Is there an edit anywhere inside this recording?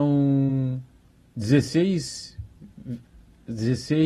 no; 0 cuts

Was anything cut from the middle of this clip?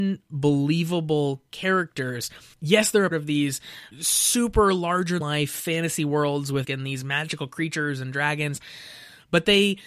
yes; 4 cuts; at 3.1 s, 3.9 s, 5.2 s, 6.6 s

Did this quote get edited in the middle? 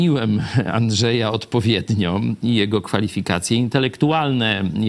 no; 0 cuts

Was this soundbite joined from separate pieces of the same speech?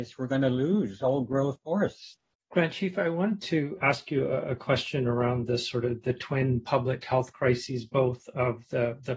no; 0 cuts

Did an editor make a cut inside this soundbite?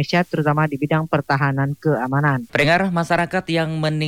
yes; 1 cut; at 2.5 s

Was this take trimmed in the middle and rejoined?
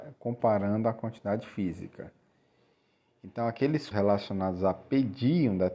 yes; 1 cut; at 3.9 s

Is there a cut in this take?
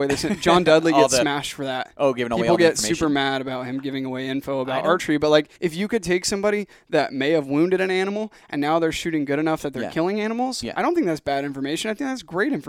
yes; 1 cut; at 5.6 s

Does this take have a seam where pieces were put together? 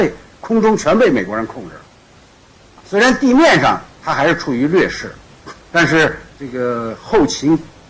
yes; 3 cuts; at 2.8 s, 5.6 s, 6.3 s

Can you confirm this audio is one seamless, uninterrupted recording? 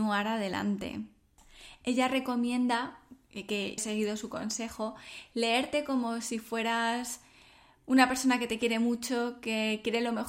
no; 1 cut; at 3.8 s

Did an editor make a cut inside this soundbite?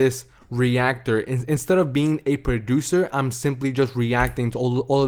no; 0 cuts

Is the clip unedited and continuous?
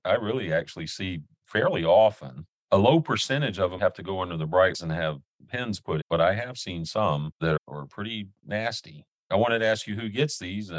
no; 4 cuts; at 3.8 s, 4.7 s, 6.0 s, 7.6 s

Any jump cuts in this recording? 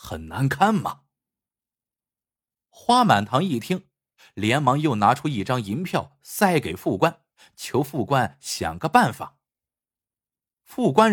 no; 0 cuts

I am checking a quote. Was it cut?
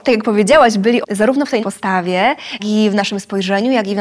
yes; 3 cuts; at 1.0 s, 1.6 s, 2.6 s

